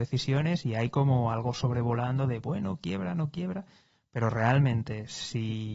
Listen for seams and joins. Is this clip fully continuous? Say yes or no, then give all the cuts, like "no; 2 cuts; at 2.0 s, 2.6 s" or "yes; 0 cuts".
yes; 0 cuts